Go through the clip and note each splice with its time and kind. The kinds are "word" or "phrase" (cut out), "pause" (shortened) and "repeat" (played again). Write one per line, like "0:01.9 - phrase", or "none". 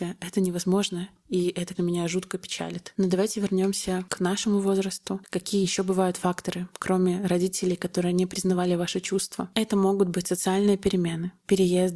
0:01.7 - word